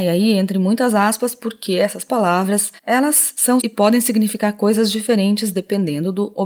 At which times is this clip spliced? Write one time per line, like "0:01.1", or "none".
0:02.8
0:03.6